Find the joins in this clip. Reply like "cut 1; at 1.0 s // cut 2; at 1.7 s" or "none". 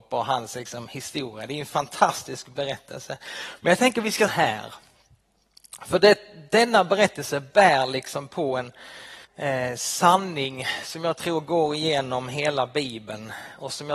cut 1; at 4.3 s // cut 2; at 9.3 s